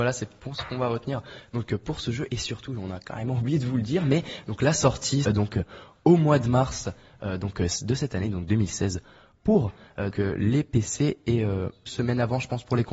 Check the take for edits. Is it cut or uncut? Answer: cut